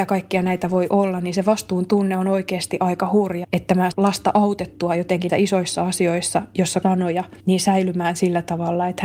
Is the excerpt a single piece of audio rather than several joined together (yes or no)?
no